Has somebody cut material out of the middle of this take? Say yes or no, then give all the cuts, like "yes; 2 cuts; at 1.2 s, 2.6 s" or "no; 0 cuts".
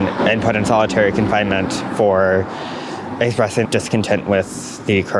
yes; 1 cut; at 3.6 s